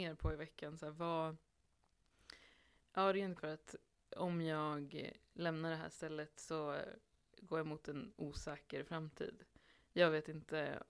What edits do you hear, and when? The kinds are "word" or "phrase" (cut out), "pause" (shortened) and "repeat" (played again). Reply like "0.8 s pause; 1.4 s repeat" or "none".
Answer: 3.4 s phrase